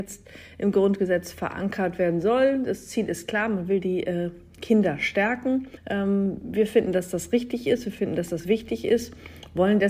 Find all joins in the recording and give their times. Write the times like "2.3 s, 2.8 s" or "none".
5.8 s